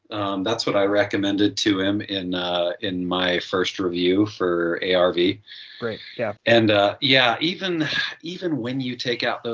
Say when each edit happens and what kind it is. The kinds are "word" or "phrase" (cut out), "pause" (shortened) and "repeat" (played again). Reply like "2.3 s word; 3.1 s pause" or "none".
6.4 s pause